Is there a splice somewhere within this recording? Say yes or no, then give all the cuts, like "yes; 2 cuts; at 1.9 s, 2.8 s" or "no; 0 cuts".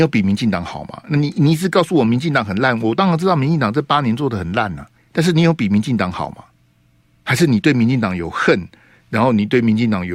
yes; 2 cuts; at 5.0 s, 6.6 s